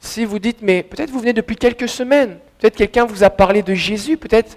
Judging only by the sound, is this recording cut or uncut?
cut